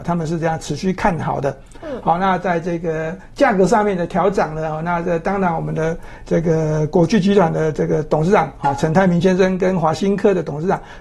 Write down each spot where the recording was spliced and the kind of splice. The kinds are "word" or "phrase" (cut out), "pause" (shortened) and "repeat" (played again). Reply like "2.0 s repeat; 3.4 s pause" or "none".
none